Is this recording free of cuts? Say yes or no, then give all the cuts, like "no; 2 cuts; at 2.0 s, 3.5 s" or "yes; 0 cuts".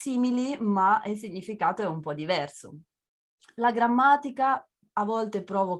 yes; 0 cuts